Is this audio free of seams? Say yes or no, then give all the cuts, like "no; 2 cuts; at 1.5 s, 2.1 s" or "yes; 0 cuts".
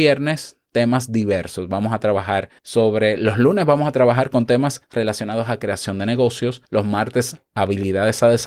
no; 3 cuts; at 2.6 s, 4.8 s, 6.6 s